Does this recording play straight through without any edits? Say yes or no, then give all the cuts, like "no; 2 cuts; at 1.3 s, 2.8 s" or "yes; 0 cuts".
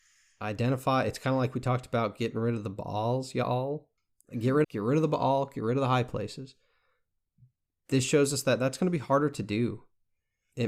no; 3 cuts; at 4.0 s, 4.6 s, 8.1 s